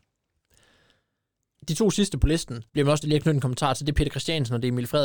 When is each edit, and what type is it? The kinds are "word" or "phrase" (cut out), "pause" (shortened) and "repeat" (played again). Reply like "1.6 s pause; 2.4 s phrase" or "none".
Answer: 2.7 s pause; 3.0 s word